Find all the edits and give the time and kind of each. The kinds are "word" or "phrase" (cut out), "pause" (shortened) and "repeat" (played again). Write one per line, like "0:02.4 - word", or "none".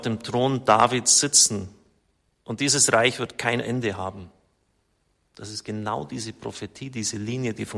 none